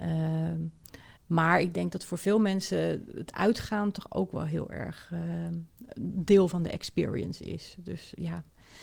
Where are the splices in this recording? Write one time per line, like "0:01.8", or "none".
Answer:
0:01.2